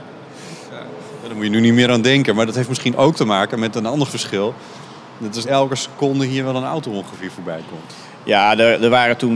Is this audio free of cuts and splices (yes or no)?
no